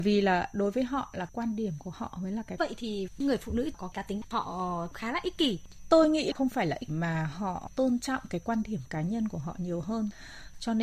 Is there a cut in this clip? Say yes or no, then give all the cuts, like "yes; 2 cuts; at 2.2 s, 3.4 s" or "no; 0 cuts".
yes; 2 cuts; at 2.6 s, 6.9 s